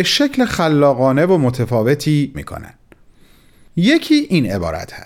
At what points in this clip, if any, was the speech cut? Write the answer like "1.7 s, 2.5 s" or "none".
2.3 s